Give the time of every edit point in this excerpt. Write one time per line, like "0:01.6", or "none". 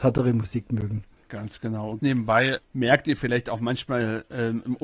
0:02.0
0:02.6